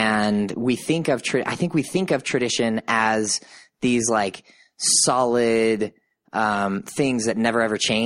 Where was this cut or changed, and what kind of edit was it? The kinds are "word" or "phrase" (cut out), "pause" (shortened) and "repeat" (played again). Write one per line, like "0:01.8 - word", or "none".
none